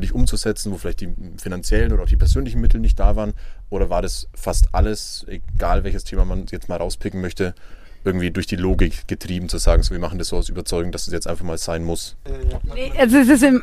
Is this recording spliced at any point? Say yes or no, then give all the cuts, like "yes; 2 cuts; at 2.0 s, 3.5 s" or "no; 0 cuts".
no; 0 cuts